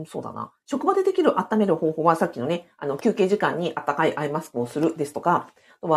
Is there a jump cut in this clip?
no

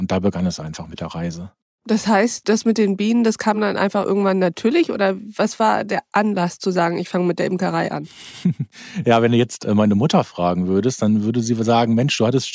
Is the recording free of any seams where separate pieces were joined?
yes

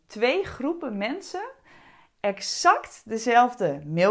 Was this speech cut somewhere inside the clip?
no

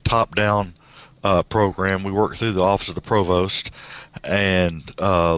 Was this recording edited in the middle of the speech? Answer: no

